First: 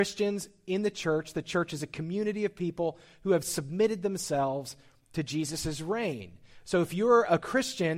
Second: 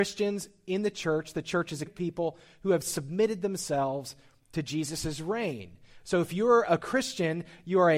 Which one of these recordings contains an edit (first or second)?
second